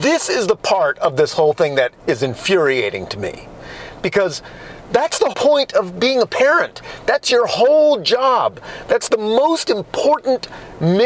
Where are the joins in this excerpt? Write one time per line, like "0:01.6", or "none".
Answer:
0:05.3